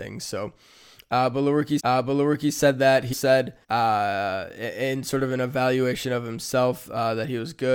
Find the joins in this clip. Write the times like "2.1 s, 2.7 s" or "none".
1.8 s, 3.1 s, 3.6 s